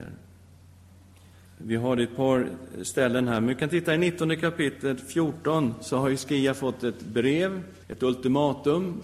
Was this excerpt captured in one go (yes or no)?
no